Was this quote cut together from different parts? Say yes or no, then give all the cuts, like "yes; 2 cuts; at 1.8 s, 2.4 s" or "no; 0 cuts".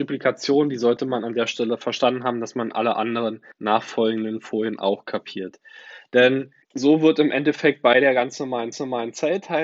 yes; 3 cuts; at 3.5 s, 6.6 s, 8.7 s